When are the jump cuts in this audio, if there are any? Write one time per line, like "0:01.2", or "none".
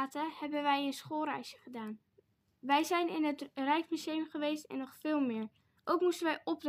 none